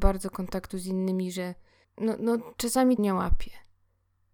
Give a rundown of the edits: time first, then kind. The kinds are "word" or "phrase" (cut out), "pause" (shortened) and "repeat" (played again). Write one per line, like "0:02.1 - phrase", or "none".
0:01.8 - word
0:03.0 - word

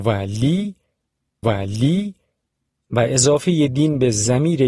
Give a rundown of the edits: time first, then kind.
0:01.4 - repeat

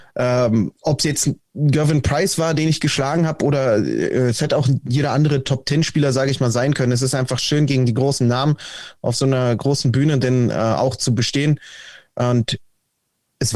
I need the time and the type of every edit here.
none

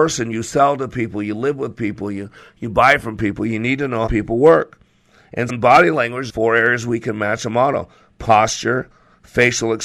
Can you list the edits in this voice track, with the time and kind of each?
0:04.1 - word
0:05.5 - word
0:06.3 - word

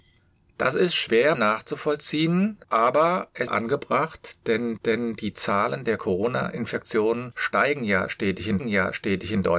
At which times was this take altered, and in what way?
0:01.3 - word
0:02.6 - pause
0:03.5 - phrase
0:04.8 - repeat
0:08.6 - repeat

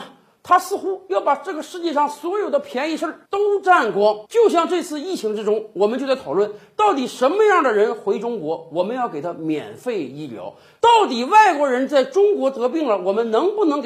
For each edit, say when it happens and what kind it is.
0:03.3 - pause
0:04.3 - pause

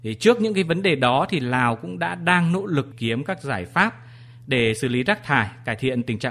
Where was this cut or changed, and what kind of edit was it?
0:02.9 - phrase

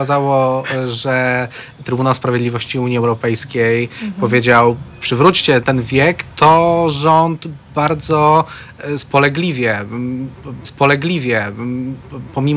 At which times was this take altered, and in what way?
0:05.6 - word
0:06.3 - pause
0:10.6 - repeat

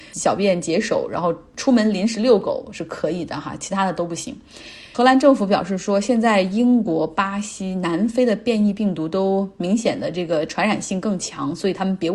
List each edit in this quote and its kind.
none

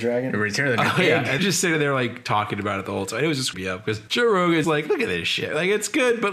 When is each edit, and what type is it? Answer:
0:01.4 - word
0:03.5 - word
0:04.1 - word
0:04.6 - word

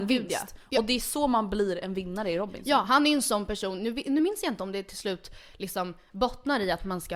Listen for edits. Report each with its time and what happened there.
none

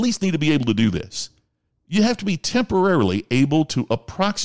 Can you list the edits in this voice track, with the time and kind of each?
none

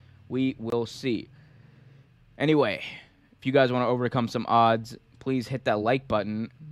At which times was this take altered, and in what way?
none

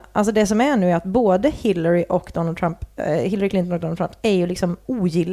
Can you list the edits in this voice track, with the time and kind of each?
none

